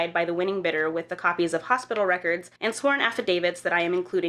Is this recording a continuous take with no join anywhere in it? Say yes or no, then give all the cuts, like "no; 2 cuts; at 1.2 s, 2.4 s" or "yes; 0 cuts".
no; 1 cut; at 2.6 s